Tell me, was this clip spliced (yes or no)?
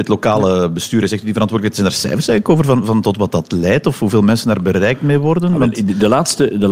no